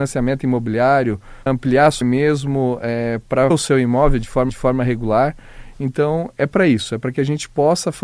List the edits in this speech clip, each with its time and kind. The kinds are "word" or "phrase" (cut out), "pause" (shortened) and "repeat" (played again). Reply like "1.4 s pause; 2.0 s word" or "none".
1.5 s word; 2.0 s phrase; 3.5 s word; 4.5 s repeat